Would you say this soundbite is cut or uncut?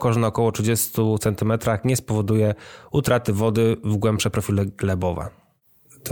uncut